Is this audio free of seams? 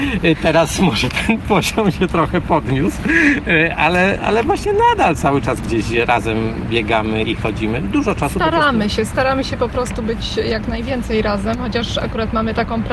no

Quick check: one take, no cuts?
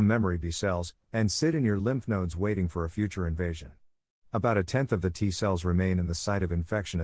yes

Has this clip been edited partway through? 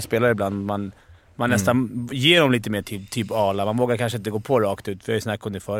no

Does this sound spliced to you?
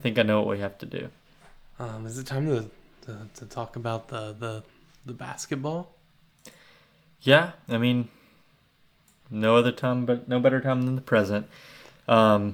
no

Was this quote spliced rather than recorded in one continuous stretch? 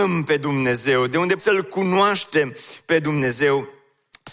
yes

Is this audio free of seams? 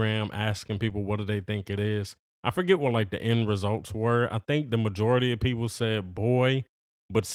yes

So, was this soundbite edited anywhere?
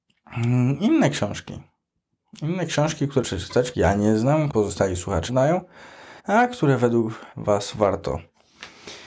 yes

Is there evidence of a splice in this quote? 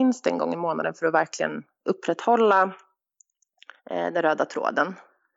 yes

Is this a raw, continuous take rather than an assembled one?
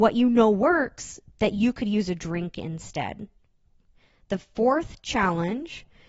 yes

